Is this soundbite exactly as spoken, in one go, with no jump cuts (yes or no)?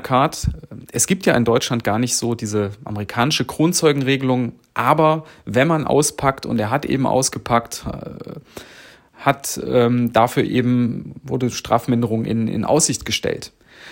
yes